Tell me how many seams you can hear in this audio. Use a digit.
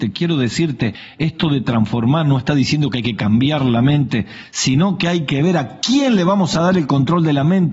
0